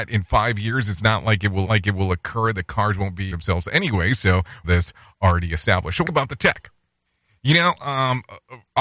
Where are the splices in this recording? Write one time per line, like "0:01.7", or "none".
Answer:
0:01.6
0:03.3
0:04.6
0:06.0
0:07.1

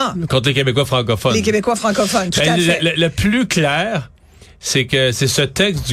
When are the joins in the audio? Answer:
none

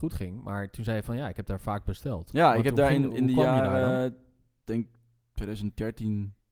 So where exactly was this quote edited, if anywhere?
none

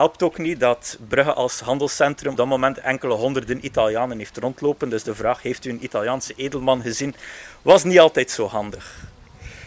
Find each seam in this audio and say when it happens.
0:02.4

